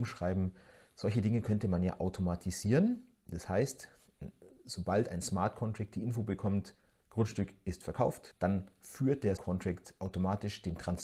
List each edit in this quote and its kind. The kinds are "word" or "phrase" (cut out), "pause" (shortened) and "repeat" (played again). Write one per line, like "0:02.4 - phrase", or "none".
0:09.4 - word